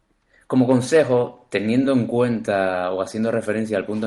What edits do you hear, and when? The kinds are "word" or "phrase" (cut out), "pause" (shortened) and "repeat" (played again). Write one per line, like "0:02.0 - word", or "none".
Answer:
none